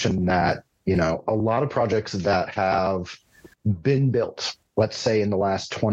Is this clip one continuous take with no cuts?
no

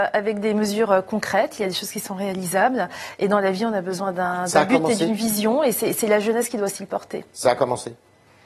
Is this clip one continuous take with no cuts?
yes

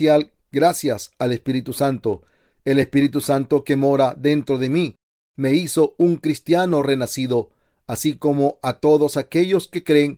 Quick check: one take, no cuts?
yes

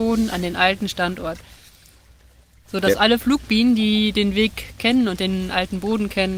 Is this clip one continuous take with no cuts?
yes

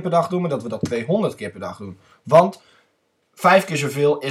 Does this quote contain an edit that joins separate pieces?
no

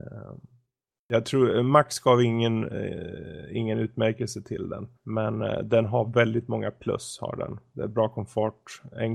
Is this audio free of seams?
no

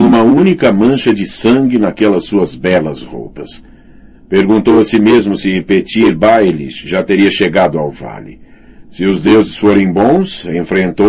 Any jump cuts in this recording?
no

